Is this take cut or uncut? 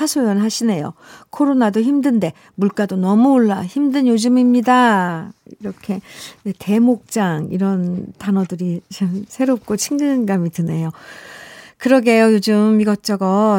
uncut